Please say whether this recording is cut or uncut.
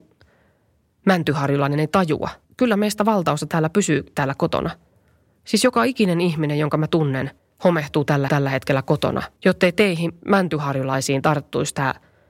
cut